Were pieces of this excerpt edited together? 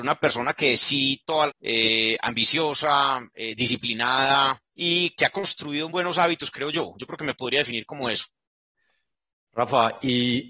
yes; 3 cuts; at 1.5 s, 4.7 s, 5.9 s

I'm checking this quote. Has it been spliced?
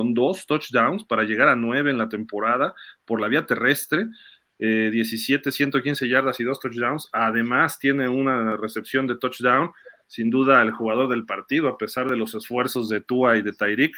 no; 0 cuts

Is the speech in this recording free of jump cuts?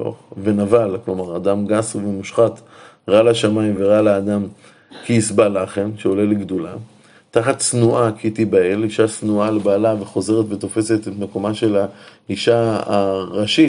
yes; 0 cuts

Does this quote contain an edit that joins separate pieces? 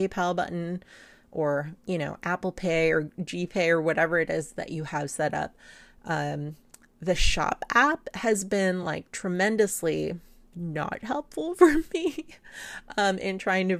no; 0 cuts

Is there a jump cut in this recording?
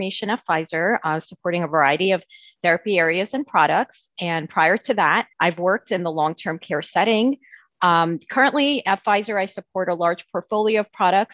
yes; 1 cut; at 5.3 s

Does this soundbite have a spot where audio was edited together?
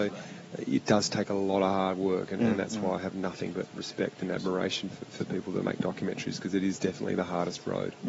no; 0 cuts

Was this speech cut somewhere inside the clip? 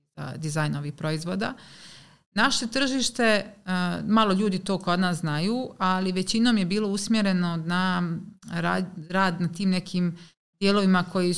no; 0 cuts

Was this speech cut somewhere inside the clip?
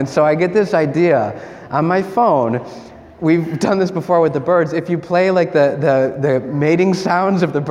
no; 0 cuts

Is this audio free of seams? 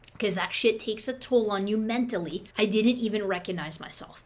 no; 1 cut; at 2.5 s

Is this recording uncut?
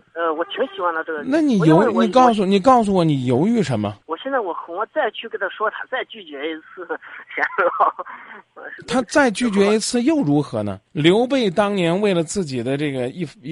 no; 2 cuts; at 4.0 s, 10.9 s

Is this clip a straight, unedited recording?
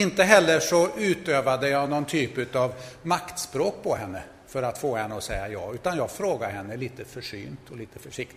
yes; 0 cuts

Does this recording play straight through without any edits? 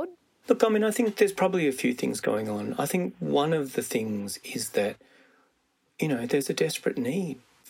yes; 0 cuts

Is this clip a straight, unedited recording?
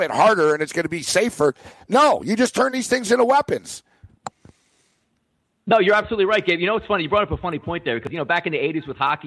yes; 0 cuts

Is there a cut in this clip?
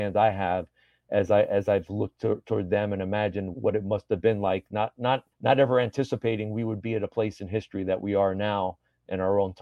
yes; 2 cuts; at 3.5 s, 5.3 s

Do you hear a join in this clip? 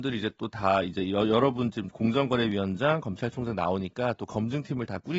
no; 0 cuts

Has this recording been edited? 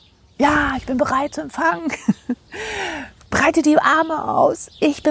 no; 0 cuts

